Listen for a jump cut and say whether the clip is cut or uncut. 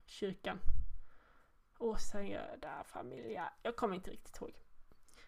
uncut